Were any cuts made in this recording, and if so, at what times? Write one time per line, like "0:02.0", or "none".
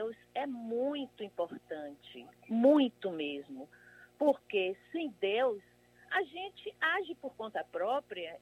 none